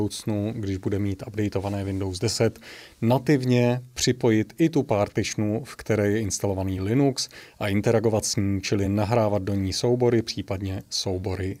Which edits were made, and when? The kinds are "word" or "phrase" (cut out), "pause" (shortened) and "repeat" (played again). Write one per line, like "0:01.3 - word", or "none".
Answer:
none